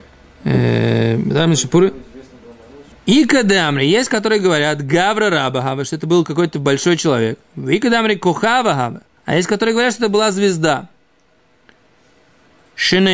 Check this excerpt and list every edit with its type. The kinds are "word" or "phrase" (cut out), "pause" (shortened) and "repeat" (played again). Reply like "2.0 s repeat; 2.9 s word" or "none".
2.9 s pause; 9.2 s pause